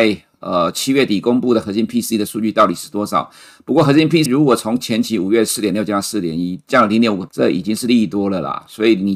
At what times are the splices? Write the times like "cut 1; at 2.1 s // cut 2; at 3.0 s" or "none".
cut 1; at 4.3 s // cut 2; at 7.3 s